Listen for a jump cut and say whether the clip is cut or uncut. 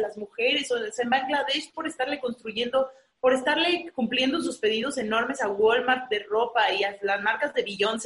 uncut